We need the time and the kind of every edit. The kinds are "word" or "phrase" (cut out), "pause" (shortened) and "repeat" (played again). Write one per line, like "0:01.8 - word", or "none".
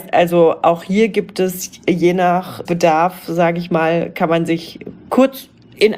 0:02.7 - word

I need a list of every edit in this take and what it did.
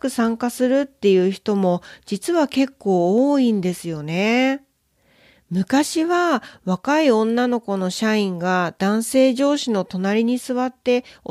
none

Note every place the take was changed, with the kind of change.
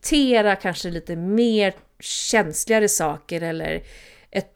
none

